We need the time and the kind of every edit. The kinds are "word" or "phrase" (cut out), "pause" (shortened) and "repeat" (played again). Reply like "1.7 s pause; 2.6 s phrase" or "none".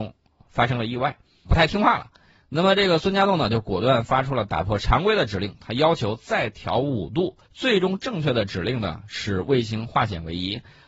1.5 s word; 7.4 s pause